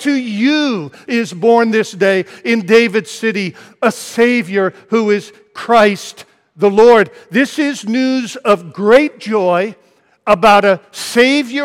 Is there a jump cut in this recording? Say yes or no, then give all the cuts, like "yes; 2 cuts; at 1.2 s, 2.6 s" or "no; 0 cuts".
no; 0 cuts